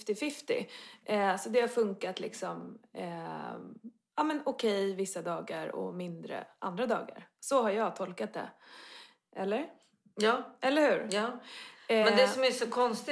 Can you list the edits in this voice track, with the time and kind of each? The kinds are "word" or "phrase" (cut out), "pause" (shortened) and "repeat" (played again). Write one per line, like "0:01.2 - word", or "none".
none